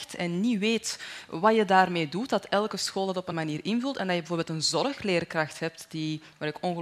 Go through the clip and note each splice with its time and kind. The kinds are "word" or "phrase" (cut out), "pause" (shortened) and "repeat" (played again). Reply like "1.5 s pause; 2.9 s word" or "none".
3.3 s word